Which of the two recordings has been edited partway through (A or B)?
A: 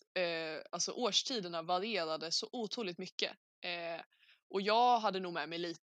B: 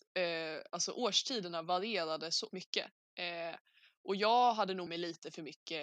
B